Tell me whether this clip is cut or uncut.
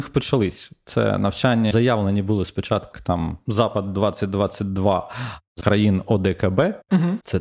cut